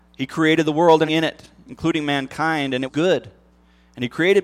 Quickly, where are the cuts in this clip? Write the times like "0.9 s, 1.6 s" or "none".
1.1 s, 2.9 s

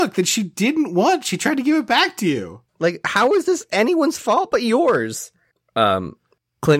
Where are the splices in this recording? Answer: 2.7 s

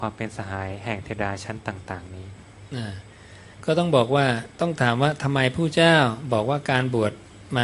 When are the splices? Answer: 3.5 s, 4.5 s

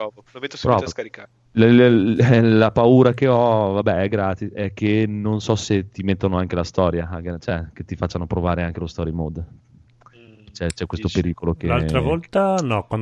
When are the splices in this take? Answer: none

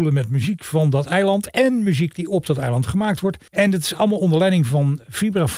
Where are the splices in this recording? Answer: 3.5 s

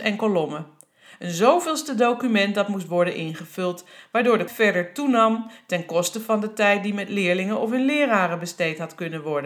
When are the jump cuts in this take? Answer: 4.5 s

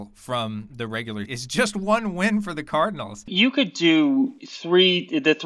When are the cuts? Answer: 1.3 s, 4.4 s

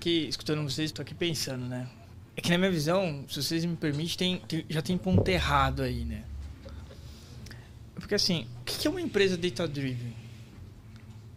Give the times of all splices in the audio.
0.9 s

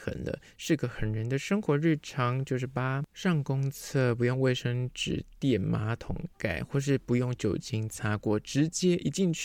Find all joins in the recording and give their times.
3.1 s

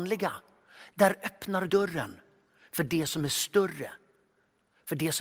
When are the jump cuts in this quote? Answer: 1.7 s

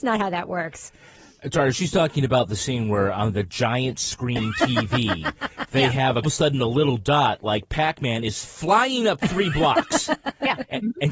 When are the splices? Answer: 6.2 s

